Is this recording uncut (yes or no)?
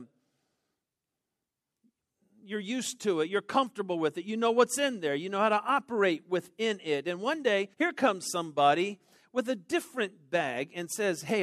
no